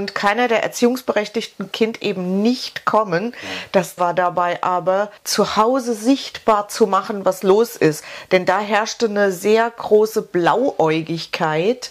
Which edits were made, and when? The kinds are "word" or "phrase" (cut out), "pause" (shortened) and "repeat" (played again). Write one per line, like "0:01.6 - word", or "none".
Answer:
0:01.7 - phrase
0:04.0 - word
0:05.2 - pause